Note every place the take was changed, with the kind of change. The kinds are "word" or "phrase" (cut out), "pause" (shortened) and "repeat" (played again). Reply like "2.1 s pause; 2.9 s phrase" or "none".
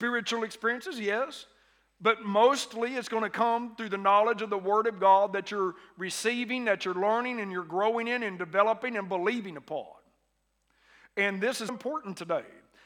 11.7 s word